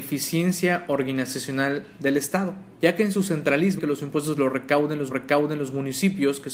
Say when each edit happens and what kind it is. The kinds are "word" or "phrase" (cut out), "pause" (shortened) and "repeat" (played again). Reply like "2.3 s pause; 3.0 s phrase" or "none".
2.7 s pause; 3.8 s word; 5.1 s repeat